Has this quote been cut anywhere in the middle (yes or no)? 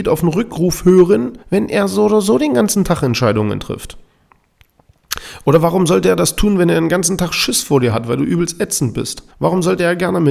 yes